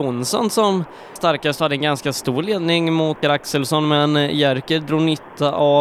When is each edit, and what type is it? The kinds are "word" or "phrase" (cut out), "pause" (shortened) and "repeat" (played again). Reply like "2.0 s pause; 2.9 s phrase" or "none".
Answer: 1.2 s word; 3.2 s word